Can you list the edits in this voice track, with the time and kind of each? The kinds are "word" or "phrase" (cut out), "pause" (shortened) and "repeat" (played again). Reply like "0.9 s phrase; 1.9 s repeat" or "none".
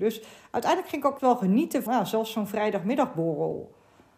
1.2 s word; 1.9 s word